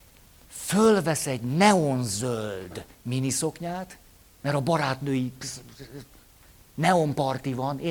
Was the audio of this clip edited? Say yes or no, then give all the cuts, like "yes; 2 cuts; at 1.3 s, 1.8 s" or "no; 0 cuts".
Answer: yes; 1 cut; at 4.1 s